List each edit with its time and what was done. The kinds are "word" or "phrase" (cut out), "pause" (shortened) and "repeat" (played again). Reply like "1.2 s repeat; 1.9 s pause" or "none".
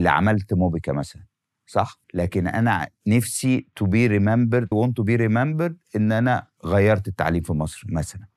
2.0 s pause; 4.7 s phrase